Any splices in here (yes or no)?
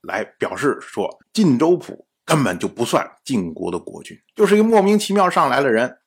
yes